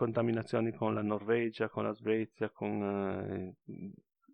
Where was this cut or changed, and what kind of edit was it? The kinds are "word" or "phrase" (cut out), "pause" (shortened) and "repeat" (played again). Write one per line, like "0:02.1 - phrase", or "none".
none